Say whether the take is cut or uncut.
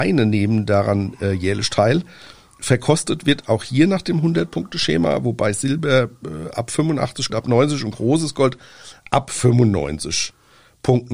cut